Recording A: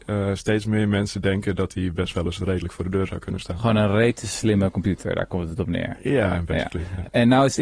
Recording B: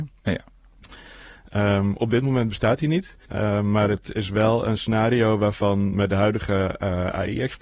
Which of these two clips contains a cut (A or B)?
B